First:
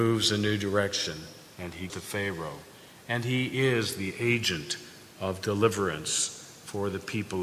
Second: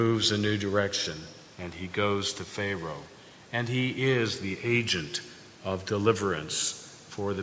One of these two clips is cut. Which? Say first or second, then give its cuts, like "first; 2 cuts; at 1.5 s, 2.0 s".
first; 1 cut; at 1.9 s